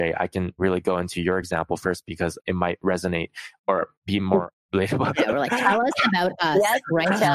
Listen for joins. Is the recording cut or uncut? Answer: uncut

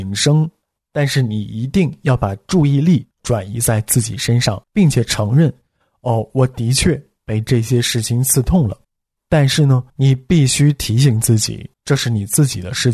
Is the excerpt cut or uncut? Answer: cut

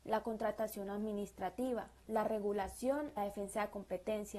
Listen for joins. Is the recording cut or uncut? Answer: cut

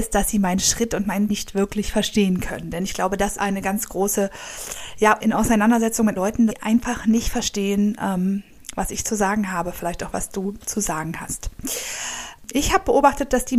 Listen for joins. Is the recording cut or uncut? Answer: cut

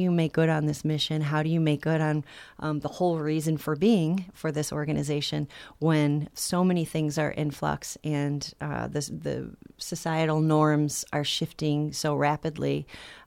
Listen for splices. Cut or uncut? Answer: uncut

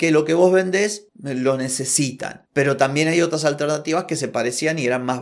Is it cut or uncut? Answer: uncut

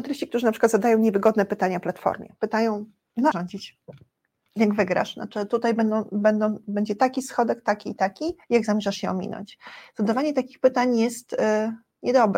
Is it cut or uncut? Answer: cut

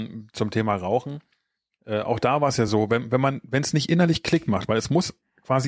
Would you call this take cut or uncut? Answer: uncut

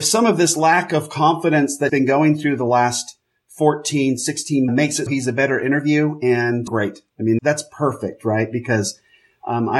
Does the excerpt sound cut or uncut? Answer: cut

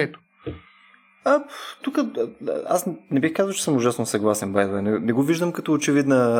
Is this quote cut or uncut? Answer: uncut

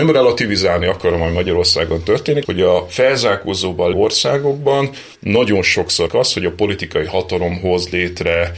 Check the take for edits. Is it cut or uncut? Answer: cut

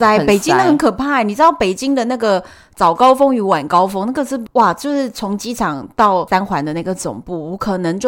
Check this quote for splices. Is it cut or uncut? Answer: uncut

